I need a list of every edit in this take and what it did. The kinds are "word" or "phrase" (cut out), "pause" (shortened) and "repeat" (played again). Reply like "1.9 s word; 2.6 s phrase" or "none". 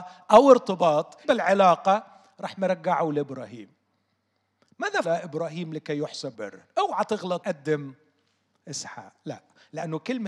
1.2 s word; 5.0 s word; 6.3 s word; 7.4 s word

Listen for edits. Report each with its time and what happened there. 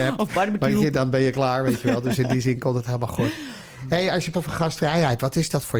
4.3 s word

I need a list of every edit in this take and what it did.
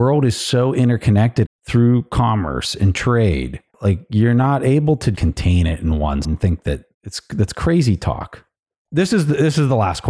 1.4 s phrase; 3.7 s pause; 5.1 s word; 6.2 s word; 6.9 s pause

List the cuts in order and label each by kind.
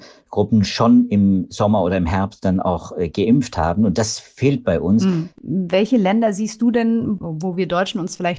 none

